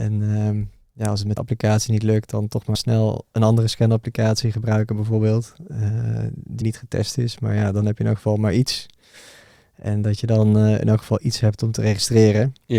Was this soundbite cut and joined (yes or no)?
yes